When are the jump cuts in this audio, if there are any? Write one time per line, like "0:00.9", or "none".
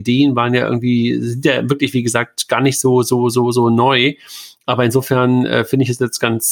none